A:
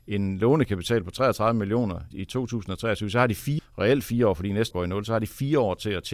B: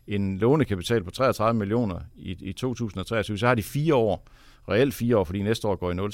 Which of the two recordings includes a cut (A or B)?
A